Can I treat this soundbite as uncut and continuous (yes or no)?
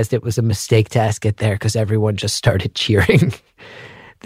yes